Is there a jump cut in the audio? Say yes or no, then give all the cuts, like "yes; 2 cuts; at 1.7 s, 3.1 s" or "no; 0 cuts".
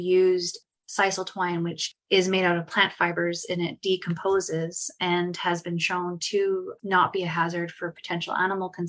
no; 0 cuts